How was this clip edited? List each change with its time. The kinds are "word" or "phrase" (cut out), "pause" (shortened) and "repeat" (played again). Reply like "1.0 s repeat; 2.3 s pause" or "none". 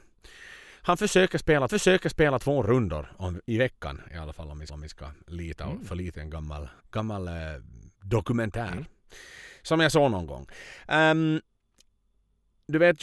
1.7 s repeat; 4.7 s repeat; 6.1 s word; 6.8 s pause; 7.9 s pause

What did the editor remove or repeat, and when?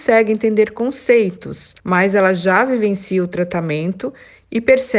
1.8 s pause

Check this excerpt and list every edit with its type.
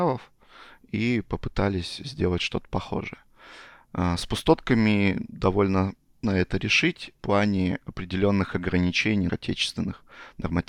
6.2 s word; 7.2 s word; 9.3 s word

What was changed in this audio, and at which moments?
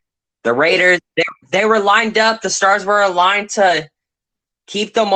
none

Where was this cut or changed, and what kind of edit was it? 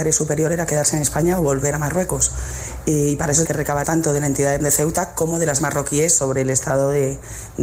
3.4 s word; 3.8 s word; 4.6 s word; 5.6 s word

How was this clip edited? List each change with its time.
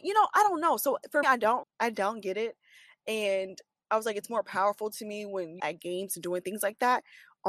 1.2 s word; 1.6 s word; 5.6 s phrase

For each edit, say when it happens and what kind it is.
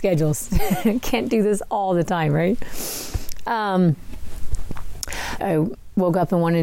5.4 s phrase

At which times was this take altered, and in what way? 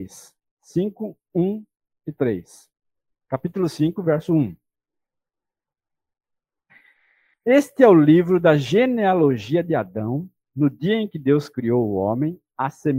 none

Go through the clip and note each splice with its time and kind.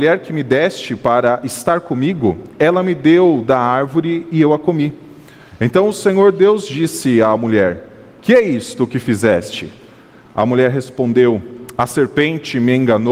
none

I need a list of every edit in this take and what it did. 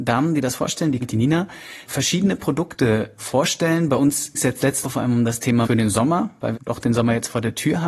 1.0 s word; 1.9 s word; 4.3 s word; 4.8 s word; 5.6 s word; 6.5 s word

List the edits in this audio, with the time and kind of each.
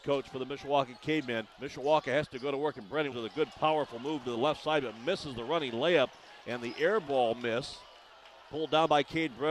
1.5 s pause; 3.1 s word

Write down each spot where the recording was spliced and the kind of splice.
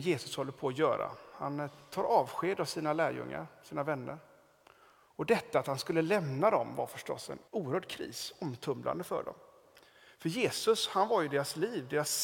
7.5 s pause

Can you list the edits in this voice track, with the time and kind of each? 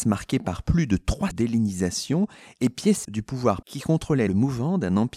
1.3 s word; 3.0 s word; 3.6 s word; 4.3 s word

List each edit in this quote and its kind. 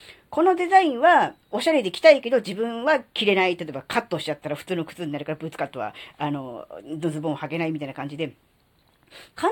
1.4 s pause

